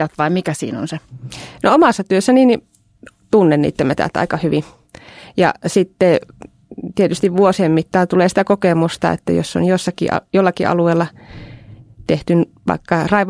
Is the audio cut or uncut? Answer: uncut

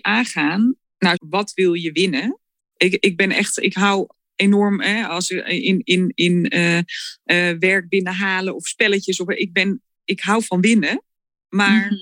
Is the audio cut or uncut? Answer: cut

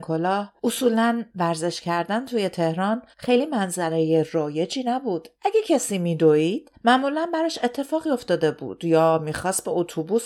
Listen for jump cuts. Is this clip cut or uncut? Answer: cut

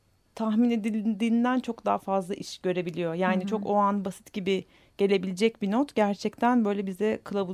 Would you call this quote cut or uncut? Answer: uncut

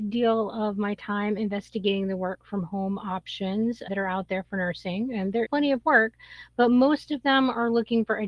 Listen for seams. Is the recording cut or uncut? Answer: cut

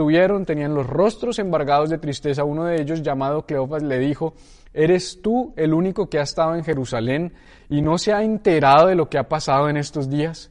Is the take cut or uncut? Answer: uncut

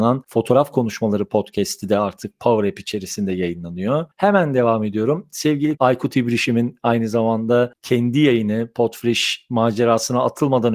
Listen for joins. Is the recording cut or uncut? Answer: cut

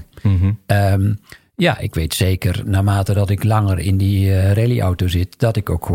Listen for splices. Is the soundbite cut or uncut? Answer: uncut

